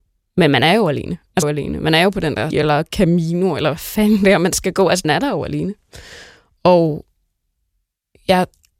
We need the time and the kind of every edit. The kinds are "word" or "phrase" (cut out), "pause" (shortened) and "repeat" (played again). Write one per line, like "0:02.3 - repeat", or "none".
0:01.4 - phrase
0:02.5 - word
0:05.0 - word